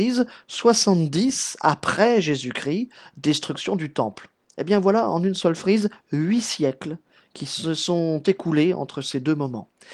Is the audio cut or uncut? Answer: uncut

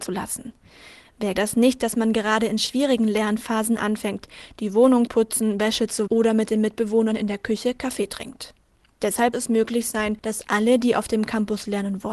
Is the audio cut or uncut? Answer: cut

